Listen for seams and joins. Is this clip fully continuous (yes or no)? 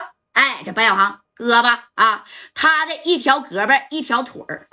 yes